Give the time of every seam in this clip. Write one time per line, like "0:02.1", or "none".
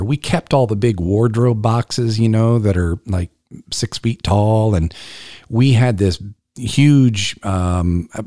none